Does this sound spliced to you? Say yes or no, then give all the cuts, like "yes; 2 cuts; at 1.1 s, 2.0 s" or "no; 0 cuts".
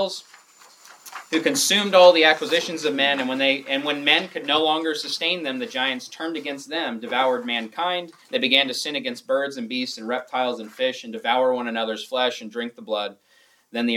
yes; 1 cut; at 8.2 s